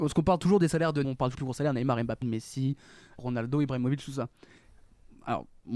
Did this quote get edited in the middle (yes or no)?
yes